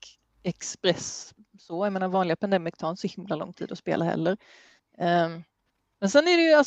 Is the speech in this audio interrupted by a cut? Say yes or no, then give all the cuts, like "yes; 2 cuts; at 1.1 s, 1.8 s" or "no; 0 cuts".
yes; 1 cut; at 4.8 s